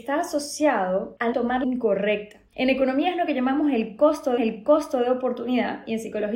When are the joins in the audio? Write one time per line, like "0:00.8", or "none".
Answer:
0:01.3
0:01.6
0:02.5
0:04.4